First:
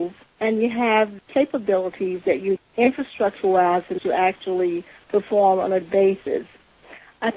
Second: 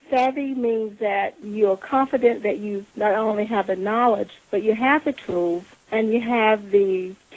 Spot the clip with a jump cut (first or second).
first